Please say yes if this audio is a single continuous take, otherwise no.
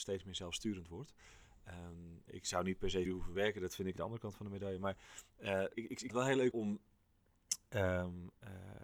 no